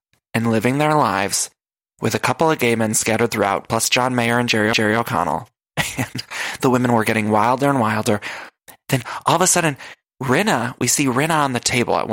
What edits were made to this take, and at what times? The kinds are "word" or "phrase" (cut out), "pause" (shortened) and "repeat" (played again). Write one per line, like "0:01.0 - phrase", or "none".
0:04.7 - repeat